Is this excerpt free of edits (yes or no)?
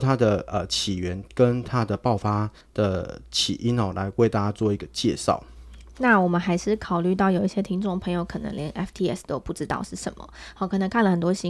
yes